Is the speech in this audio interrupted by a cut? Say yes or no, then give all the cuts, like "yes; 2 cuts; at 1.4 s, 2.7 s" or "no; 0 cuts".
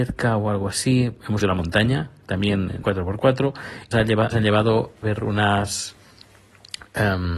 yes; 5 cuts; at 1.4 s, 2.8 s, 3.9 s, 4.3 s, 5.0 s